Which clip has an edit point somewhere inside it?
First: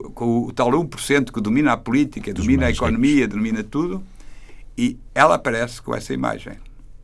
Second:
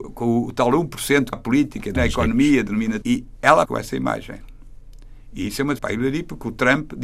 second; 5 cuts; at 1.3 s, 2.0 s, 3.0 s, 3.6 s, 5.8 s

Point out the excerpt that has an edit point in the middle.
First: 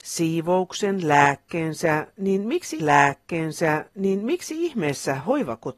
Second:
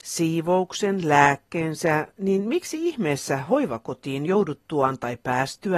first; 1 cut; at 2.8 s

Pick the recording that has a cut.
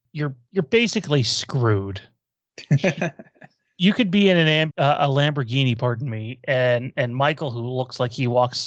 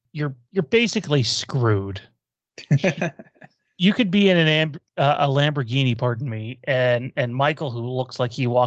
first; 1 cut; at 4.7 s

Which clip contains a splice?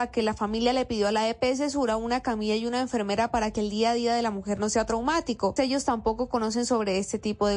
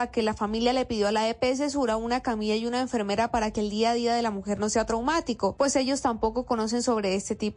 first; 1 cut; at 5.6 s

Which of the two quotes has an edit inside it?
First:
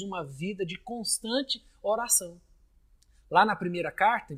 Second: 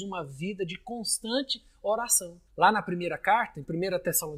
second; 1 cut; at 2.5 s

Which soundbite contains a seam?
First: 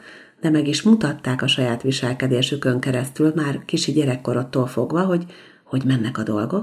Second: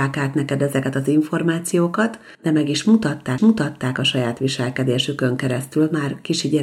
second; 2 cuts; at 2.3 s, 3.4 s

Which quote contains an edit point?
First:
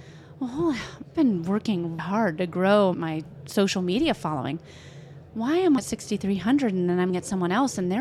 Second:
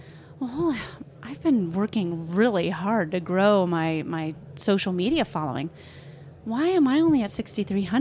first; 5 cuts; at 1.1 s, 2.0 s, 2.9 s, 5.8 s, 7.1 s

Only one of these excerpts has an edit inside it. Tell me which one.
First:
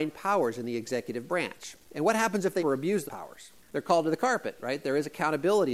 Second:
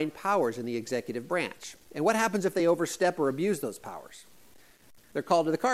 first; 3 cuts; at 2.6 s, 3.1 s, 3.6 s

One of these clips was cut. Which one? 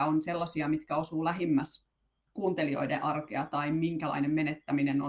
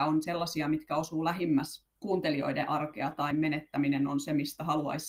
second; 2 cuts; at 2.0 s, 3.3 s

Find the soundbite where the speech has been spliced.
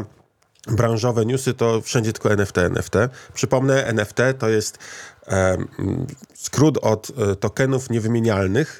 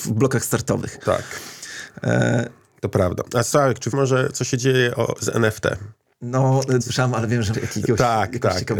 second; 3 cuts; at 3.9 s, 6.8 s, 7.5 s

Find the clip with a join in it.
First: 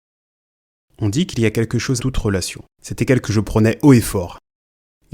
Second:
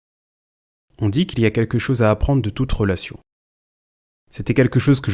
first; 3 cuts; at 2.0 s, 2.7 s, 3.2 s

